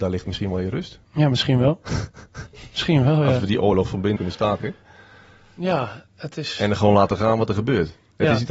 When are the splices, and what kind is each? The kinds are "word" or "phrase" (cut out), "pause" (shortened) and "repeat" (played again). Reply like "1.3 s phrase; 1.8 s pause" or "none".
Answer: 1.0 s pause; 4.2 s word